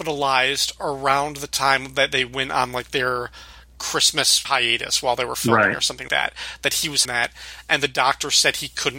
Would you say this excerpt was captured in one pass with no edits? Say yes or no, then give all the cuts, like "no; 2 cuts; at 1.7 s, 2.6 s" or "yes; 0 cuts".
no; 3 cuts; at 4.4 s, 6.1 s, 7.0 s